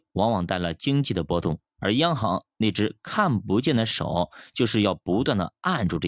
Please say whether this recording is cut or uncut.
uncut